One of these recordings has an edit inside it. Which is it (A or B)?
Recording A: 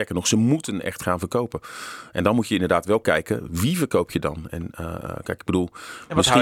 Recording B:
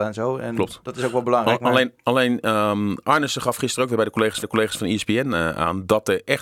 B